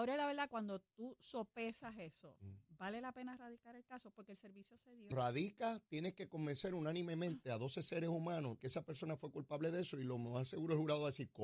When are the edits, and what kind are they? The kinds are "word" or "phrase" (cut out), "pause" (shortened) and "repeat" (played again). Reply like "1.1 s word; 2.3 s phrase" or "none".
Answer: 5.1 s phrase; 8.6 s word